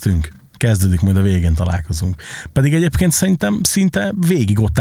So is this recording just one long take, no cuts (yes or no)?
yes